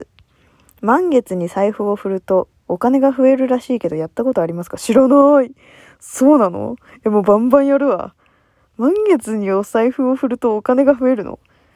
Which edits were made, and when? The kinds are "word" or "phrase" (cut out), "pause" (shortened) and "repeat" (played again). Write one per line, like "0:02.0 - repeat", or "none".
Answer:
none